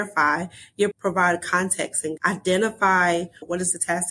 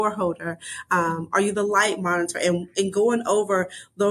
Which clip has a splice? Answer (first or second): first